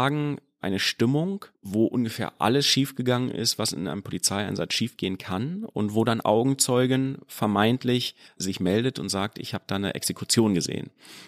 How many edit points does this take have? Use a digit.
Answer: 3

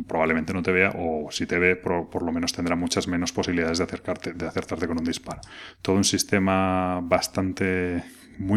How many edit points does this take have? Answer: 0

